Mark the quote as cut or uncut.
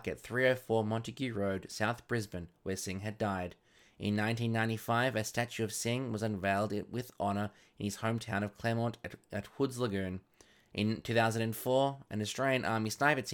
uncut